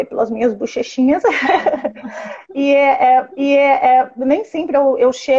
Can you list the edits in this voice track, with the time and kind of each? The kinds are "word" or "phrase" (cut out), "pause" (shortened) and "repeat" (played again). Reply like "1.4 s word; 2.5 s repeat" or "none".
3.3 s repeat